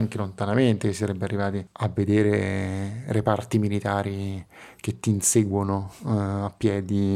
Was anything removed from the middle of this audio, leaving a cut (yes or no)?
no